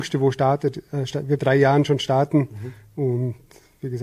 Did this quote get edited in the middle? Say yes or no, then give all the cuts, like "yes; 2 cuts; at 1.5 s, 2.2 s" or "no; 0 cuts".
yes; 1 cut; at 1.4 s